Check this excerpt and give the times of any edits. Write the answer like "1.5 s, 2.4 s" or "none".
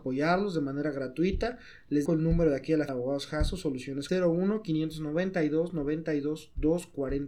2.1 s, 2.9 s, 4.1 s